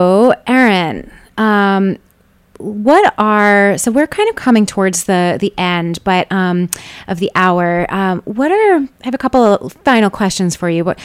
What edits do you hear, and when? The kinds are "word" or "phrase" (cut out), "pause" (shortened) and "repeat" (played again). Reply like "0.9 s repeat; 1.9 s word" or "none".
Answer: none